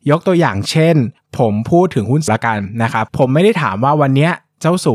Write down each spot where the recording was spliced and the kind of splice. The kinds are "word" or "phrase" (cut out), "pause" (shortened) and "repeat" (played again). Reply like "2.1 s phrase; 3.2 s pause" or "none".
2.3 s word